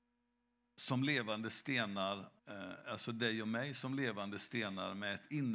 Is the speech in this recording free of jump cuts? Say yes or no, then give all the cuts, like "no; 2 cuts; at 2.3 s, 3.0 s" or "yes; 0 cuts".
no; 1 cut; at 2.4 s